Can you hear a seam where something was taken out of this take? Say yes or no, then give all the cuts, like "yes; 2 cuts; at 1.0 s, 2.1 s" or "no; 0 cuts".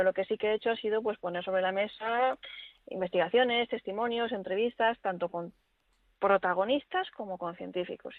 no; 0 cuts